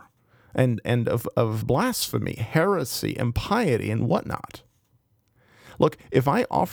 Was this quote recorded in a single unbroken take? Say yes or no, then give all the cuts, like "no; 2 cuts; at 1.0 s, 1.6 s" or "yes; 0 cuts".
no; 1 cut; at 1.6 s